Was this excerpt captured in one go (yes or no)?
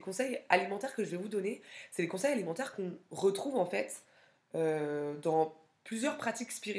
yes